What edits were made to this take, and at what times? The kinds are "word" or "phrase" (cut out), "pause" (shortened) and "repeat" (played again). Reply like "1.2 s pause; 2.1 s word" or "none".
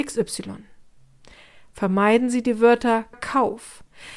3.1 s phrase

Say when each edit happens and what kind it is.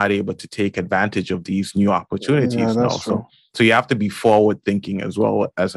none

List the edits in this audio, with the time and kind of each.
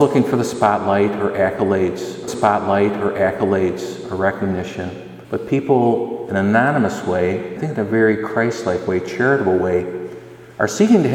2.3 s repeat; 5.2 s pause; 7.6 s phrase

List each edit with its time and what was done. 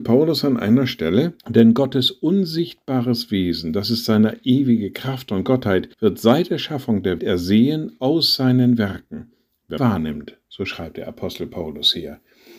1.4 s pause; 5.9 s pause; 7.2 s word; 9.8 s phrase

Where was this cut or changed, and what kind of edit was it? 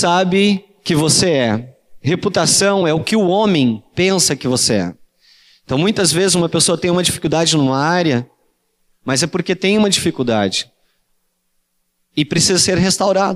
none

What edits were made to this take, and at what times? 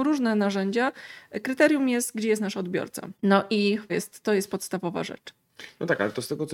3.1 s pause; 3.9 s word

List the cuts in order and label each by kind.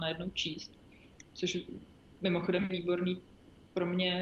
2.7 s word

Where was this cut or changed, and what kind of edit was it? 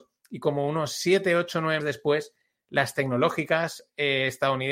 1.8 s word

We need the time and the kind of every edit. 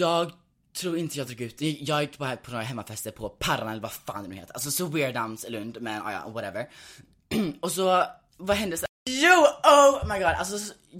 none

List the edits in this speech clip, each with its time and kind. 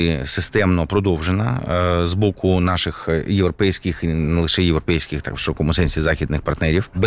none

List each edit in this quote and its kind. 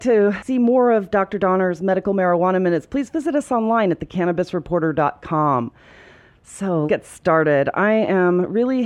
6.9 s word

